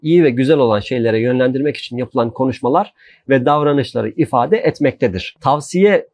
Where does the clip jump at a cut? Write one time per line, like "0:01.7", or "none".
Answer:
none

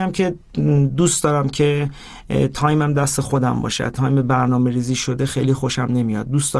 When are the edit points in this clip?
none

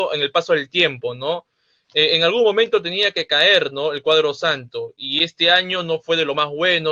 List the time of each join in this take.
none

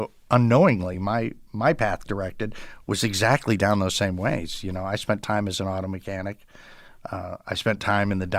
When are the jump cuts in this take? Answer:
none

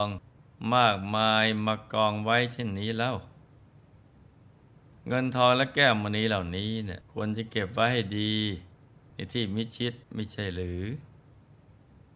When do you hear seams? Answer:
0:07.1
0:10.0

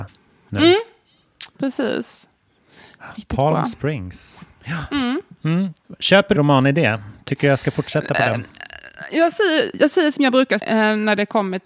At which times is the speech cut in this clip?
0:06.3
0:10.6

